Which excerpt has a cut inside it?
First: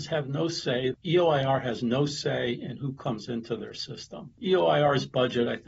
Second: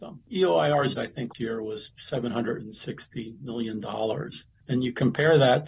second; 2 cuts; at 1.0 s, 1.3 s

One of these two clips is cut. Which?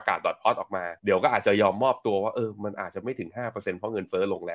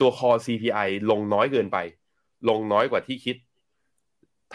first; 1 cut; at 1.0 s

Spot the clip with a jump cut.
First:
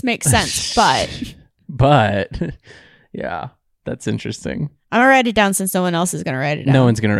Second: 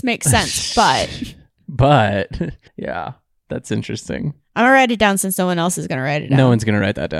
second; 1 cut; at 2.7 s

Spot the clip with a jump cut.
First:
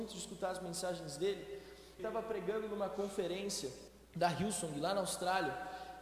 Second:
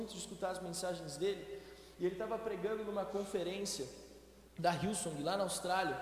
first; 2 cuts; at 2.0 s, 3.9 s

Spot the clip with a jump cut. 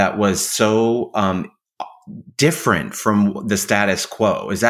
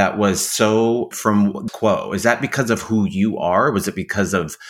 second; 2 cuts; at 1.1 s, 1.7 s

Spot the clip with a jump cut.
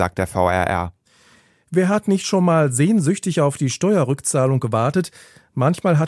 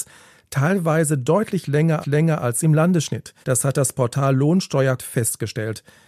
second; 3 cuts; at 2.0 s, 3.4 s, 5.0 s

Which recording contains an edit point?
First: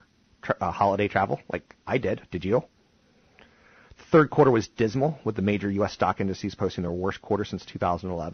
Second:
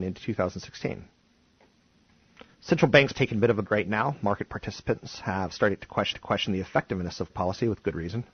second; 5 cuts; at 2.5 s, 3.1 s, 3.6 s, 6.1 s, 7.3 s

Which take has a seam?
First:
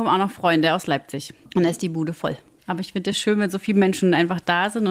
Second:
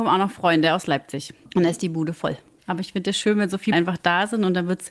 second; 1 cut; at 3.7 s

